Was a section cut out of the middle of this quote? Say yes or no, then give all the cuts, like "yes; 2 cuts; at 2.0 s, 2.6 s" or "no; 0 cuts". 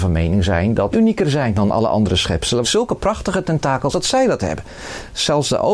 yes; 3 cuts; at 0.9 s, 2.6 s, 3.9 s